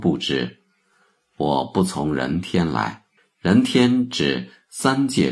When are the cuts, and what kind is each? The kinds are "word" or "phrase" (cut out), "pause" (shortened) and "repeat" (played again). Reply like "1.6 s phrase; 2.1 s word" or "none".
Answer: 3.2 s pause